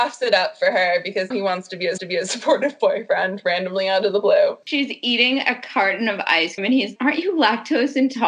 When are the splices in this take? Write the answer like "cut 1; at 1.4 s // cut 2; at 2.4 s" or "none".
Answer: cut 1; at 1.3 s // cut 2; at 2.0 s // cut 3; at 4.6 s // cut 4; at 6.6 s // cut 5; at 7.0 s